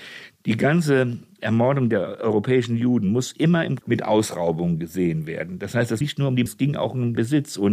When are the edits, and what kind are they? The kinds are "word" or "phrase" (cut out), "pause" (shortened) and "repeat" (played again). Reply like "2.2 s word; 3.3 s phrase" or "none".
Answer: 3.8 s word; 6.0 s word; 6.5 s word